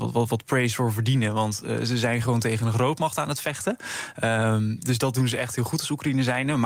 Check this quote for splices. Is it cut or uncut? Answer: uncut